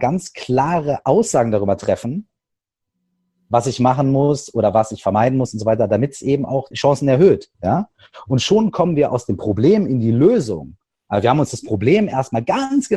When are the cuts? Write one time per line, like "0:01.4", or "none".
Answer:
0:06.7
0:07.5